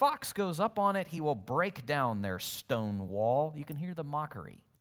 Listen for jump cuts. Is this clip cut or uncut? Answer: uncut